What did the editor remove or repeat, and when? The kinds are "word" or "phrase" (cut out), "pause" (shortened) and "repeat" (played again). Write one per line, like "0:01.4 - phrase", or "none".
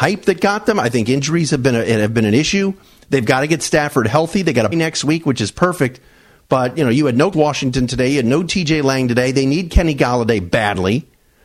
0:04.7 - word
0:07.3 - word